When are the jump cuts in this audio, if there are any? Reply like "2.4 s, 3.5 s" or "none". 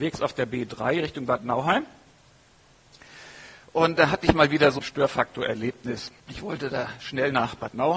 4.8 s, 6.2 s